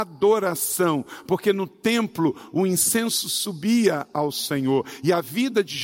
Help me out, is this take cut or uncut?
uncut